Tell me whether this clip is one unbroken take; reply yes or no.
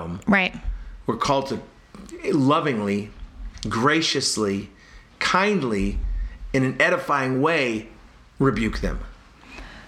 yes